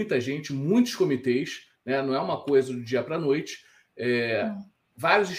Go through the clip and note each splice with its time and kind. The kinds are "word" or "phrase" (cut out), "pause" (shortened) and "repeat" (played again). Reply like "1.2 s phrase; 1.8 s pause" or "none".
none